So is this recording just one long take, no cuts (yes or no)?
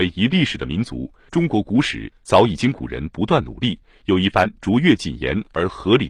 yes